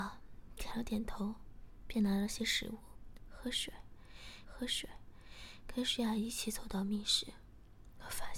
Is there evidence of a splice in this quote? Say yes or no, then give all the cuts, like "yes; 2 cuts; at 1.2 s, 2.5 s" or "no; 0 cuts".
yes; 1 cut; at 4.4 s